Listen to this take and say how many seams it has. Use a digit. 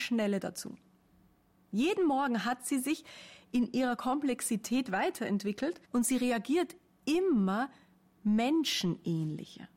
1